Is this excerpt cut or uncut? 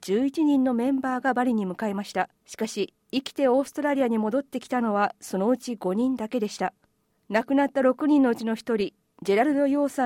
cut